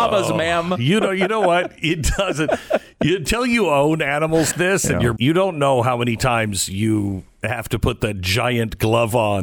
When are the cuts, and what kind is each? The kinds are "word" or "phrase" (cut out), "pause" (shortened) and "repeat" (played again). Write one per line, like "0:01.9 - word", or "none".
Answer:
0:04.5 - word
0:05.2 - word